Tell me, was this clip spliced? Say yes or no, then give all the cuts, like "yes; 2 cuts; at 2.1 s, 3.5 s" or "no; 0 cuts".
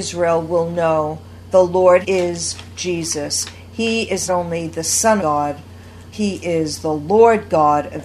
yes; 5 cuts; at 1.5 s, 2.0 s, 4.3 s, 5.2 s, 6.1 s